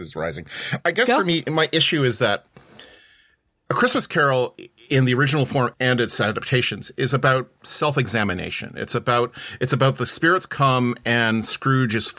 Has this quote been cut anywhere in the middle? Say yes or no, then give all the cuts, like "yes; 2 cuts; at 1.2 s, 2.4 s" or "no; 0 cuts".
no; 0 cuts